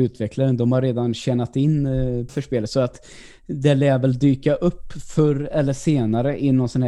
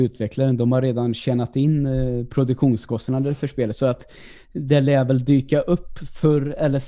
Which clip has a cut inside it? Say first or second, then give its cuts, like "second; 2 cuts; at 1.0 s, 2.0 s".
first; 1 cut; at 2.3 s